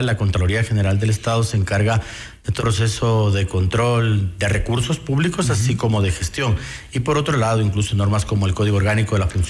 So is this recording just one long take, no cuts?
no; 1 cut; at 2.6 s

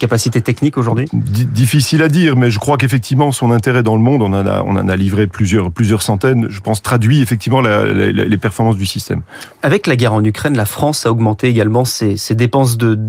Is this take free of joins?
yes; 0 cuts

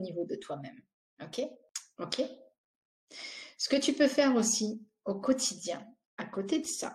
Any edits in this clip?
no; 0 cuts

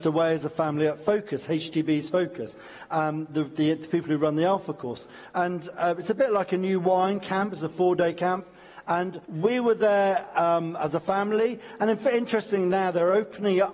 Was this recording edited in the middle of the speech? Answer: yes; 1 cut; at 9.2 s

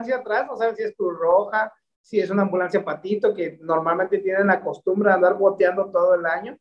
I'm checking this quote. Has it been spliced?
no; 0 cuts

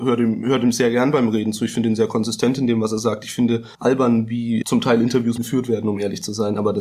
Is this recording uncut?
no; 3 cuts; at 3.7 s, 4.6 s, 5.4 s

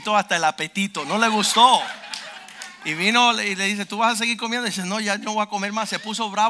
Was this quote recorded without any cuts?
yes; 0 cuts

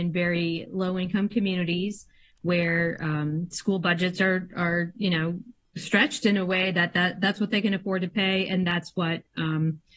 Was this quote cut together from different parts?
no; 0 cuts

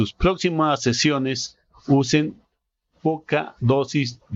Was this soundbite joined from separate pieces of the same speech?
no; 0 cuts

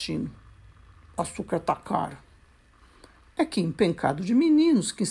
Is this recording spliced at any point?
no; 0 cuts

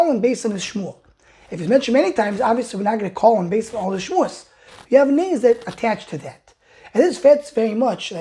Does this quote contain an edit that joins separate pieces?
no; 0 cuts

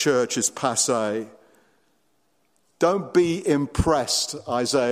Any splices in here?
no; 0 cuts

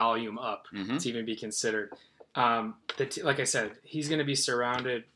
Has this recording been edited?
no; 0 cuts

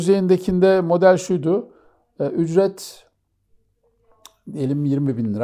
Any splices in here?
no; 0 cuts

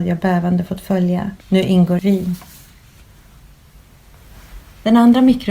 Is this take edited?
yes; 2 cuts; at 1.4 s, 2.0 s

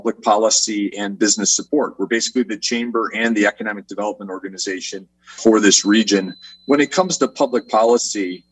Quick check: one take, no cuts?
yes; 0 cuts

